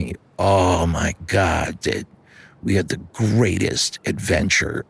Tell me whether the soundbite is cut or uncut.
cut